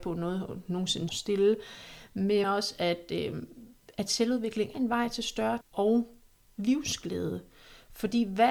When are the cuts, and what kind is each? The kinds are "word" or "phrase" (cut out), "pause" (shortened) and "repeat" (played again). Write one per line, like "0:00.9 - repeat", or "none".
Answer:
0:01.1 - word
0:02.4 - word
0:04.7 - word
0:05.6 - word